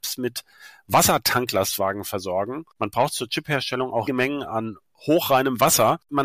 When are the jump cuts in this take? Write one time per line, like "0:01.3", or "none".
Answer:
0:04.1
0:04.4